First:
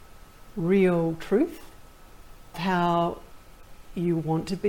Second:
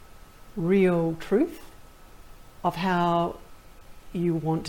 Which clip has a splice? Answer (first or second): first